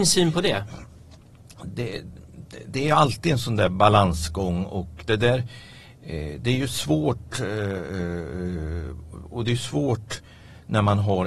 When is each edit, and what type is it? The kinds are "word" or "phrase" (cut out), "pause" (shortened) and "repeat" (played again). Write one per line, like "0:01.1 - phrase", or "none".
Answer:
0:01.7 - word